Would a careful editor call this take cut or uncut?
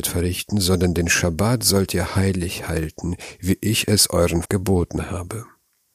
cut